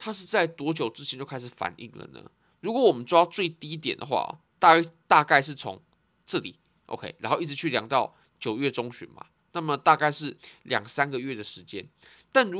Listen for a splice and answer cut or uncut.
uncut